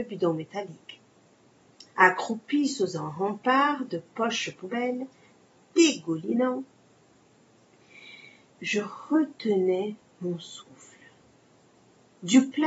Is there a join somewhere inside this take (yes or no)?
no